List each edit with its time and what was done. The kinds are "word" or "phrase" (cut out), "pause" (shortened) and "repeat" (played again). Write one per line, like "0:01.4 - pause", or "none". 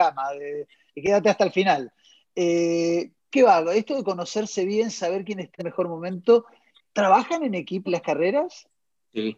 0:03.3 - word
0:05.6 - word
0:06.8 - word
0:07.9 - word